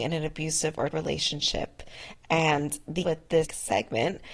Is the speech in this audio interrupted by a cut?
yes; 3 cuts; at 0.9 s, 3.0 s, 3.4 s

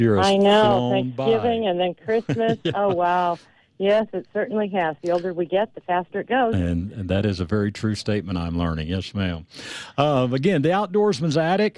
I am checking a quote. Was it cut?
no; 0 cuts

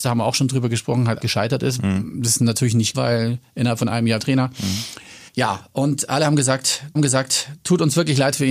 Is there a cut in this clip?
yes; 5 cuts; at 1.2 s, 2.9 s, 4.2 s, 5.3 s, 7.0 s

